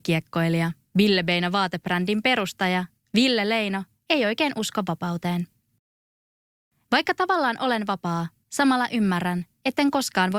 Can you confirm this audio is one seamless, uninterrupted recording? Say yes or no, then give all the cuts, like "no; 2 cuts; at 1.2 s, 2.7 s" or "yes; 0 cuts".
yes; 0 cuts